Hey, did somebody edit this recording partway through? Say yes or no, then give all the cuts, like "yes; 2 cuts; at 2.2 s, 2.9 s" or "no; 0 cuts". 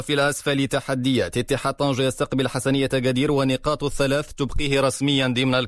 no; 0 cuts